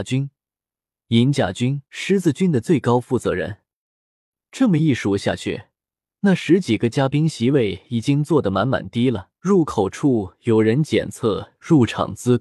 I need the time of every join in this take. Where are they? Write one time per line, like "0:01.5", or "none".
0:01.9
0:09.4